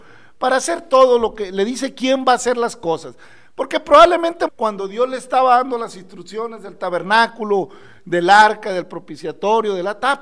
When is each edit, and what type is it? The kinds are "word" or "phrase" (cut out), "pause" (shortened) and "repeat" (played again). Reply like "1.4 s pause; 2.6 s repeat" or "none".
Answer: 4.5 s word